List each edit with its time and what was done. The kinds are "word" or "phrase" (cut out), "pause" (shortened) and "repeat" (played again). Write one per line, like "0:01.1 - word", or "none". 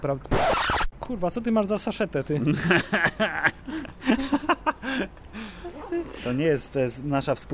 none